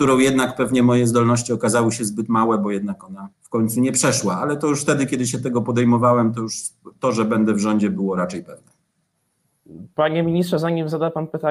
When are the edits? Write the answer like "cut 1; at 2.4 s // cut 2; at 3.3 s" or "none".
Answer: cut 1; at 3.3 s